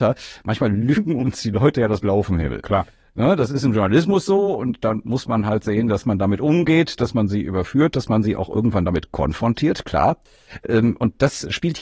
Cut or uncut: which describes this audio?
uncut